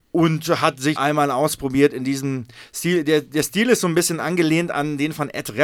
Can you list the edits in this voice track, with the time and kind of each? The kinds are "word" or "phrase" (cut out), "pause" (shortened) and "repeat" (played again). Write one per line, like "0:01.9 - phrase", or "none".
0:01.0 - word